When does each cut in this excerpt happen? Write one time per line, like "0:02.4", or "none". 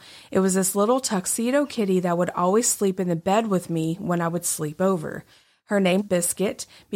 0:06.0